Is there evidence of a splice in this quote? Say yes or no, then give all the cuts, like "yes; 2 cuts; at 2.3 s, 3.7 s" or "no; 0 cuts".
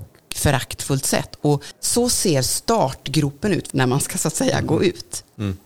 yes; 1 cut; at 3.7 s